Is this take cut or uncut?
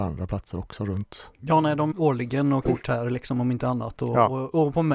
cut